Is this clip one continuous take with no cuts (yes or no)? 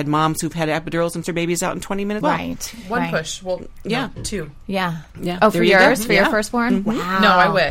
no